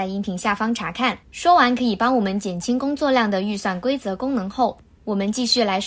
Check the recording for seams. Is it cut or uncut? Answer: cut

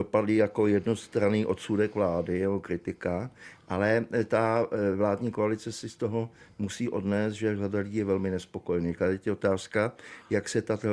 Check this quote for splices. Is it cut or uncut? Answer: uncut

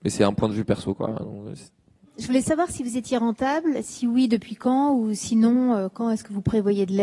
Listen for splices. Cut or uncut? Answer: uncut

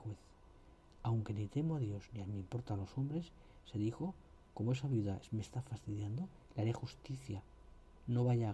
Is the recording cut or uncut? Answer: uncut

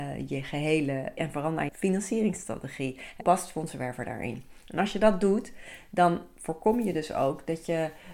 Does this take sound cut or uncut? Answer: cut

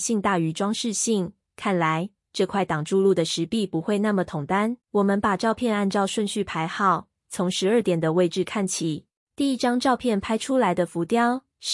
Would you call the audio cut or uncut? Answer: cut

